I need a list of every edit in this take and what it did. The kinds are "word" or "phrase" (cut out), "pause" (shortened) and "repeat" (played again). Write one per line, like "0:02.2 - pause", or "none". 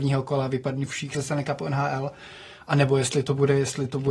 none